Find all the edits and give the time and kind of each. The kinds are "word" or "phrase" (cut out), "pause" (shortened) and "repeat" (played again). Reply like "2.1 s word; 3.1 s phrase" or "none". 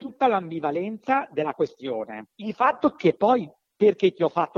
none

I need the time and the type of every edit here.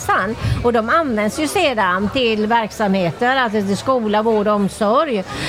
none

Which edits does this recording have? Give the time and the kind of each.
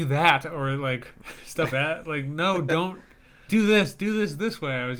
1.7 s word; 3.5 s word

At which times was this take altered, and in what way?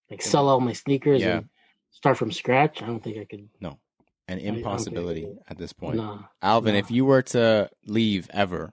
none

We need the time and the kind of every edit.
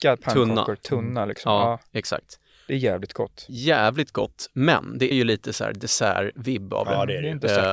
5.1 s word

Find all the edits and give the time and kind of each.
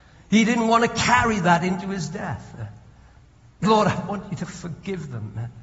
3.6 s word

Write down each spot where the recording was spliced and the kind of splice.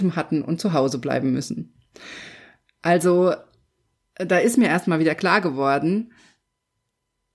none

